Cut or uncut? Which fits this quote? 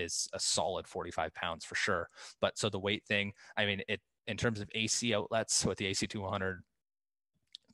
uncut